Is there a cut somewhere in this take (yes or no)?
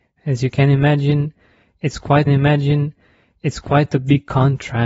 yes